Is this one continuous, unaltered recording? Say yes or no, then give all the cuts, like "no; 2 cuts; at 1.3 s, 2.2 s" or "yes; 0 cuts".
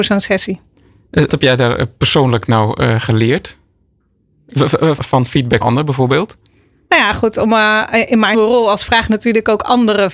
no; 5 cuts; at 1.3 s, 5.0 s, 5.6 s, 8.3 s, 8.9 s